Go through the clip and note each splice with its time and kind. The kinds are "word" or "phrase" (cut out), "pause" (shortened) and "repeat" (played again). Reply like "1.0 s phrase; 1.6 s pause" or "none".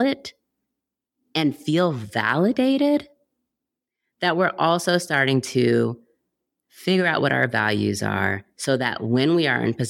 none